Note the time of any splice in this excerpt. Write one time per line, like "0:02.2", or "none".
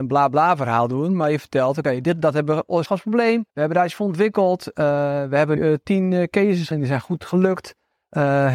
0:02.9
0:03.5
0:05.6
0:06.7